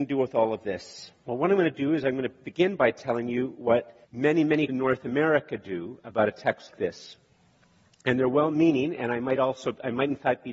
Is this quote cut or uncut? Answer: cut